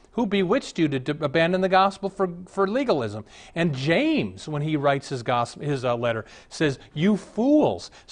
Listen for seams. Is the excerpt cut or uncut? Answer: uncut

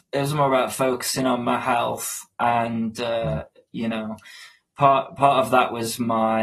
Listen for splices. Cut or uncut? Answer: uncut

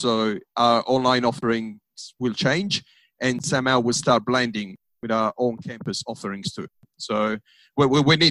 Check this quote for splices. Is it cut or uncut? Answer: uncut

